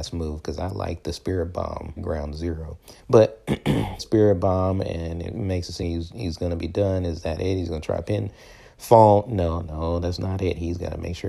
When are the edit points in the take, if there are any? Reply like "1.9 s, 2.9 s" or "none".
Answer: 2.0 s, 3.0 s, 4.0 s, 5.8 s